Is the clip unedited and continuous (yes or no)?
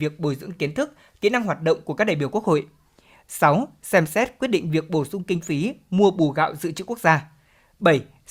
yes